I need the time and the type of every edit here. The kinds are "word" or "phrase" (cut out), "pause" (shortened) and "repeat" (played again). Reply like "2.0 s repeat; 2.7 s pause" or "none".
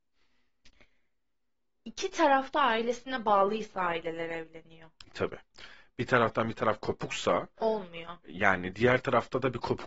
none